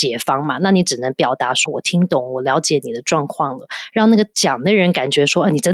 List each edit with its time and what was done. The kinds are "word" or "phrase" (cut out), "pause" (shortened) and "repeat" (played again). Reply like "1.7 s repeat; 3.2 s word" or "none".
1.7 s word